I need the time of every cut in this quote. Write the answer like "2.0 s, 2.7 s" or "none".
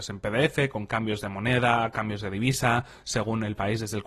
none